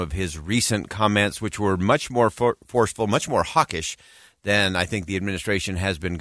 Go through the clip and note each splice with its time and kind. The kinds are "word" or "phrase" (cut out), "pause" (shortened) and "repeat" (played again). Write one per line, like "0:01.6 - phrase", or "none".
none